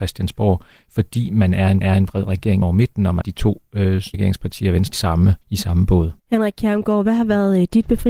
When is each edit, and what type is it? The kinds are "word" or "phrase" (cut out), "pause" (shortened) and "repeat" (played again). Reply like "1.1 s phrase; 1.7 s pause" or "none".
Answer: 1.8 s repeat; 2.6 s word; 3.2 s word; 4.1 s phrase; 4.9 s phrase; 5.4 s pause; 6.2 s pause